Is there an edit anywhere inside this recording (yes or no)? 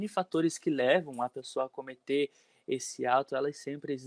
no